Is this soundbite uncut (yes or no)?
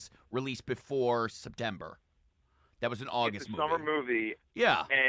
yes